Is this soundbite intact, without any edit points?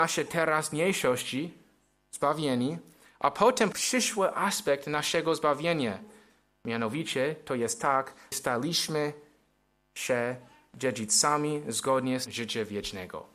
no; 3 cuts; at 3.7 s, 8.3 s, 12.3 s

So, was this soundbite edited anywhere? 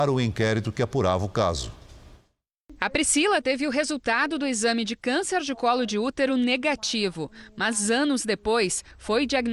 no; 0 cuts

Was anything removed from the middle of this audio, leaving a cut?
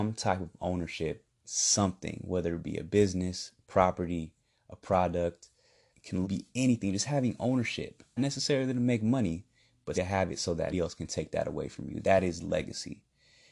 yes; 6 cuts; at 1.4 s, 5.9 s, 6.2 s, 8.2 s, 9.9 s, 10.7 s

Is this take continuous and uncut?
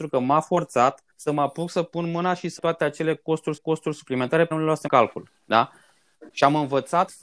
no; 6 cuts; at 1.1 s, 2.6 s, 3.6 s, 4.5 s, 4.9 s, 5.4 s

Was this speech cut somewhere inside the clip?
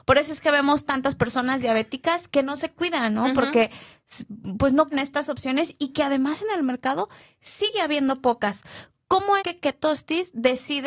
yes; 2 cuts; at 4.9 s, 9.4 s

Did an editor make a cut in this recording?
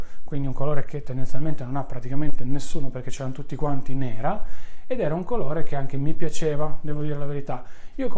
no; 0 cuts

